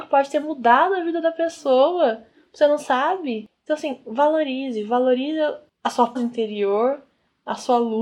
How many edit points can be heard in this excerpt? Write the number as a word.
one